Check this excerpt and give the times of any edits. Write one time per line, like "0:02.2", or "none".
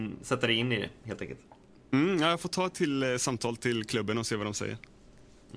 none